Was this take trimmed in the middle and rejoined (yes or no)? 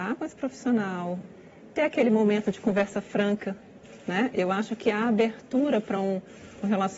no